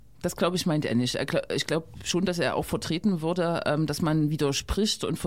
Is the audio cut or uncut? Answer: uncut